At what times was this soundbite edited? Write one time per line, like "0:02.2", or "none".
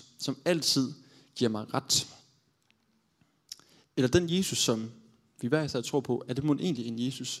none